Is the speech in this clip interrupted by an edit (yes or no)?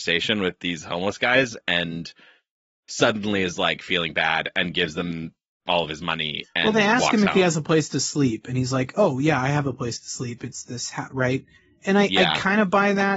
yes